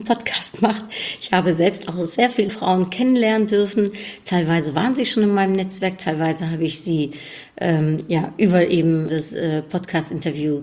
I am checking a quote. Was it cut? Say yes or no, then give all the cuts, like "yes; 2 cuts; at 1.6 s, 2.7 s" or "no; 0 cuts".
yes; 2 cuts; at 2.5 s, 9.1 s